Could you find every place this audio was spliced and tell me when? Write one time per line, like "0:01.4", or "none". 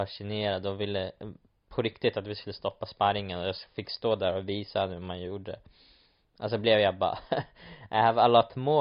none